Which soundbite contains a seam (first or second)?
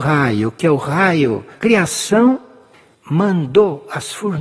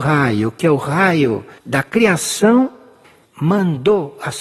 first